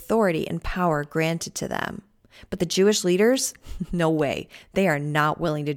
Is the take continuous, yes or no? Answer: yes